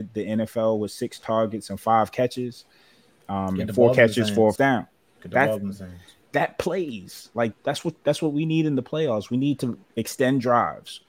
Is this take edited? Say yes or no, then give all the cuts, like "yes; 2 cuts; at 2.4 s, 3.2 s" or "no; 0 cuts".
yes; 2 cuts; at 4.6 s, 7.5 s